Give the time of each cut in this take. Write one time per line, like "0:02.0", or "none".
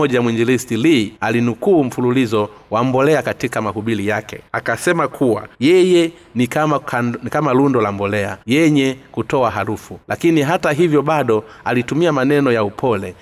0:01.2
0:04.5
0:05.5
0:08.4
0:10.0